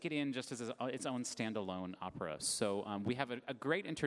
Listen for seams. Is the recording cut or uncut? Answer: uncut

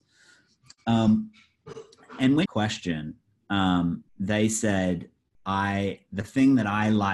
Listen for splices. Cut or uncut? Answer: cut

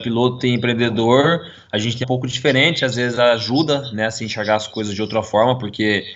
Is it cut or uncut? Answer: cut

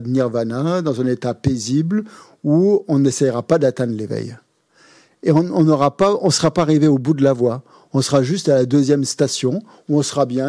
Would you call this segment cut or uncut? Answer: uncut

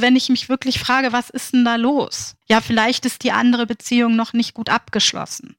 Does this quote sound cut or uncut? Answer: cut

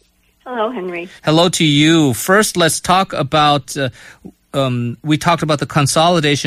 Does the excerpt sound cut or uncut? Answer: cut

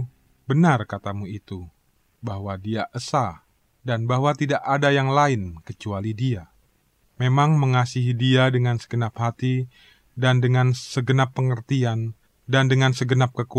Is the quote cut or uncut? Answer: uncut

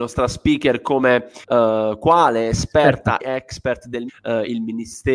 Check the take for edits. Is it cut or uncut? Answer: cut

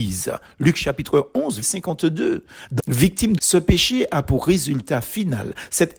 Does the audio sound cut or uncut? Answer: cut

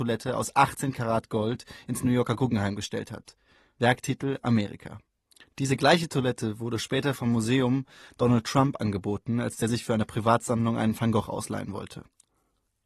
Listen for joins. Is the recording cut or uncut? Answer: uncut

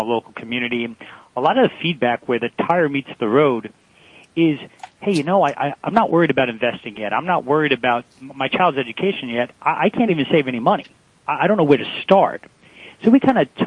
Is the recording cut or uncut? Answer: uncut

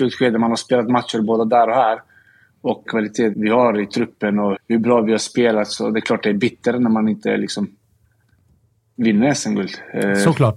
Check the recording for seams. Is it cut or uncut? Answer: cut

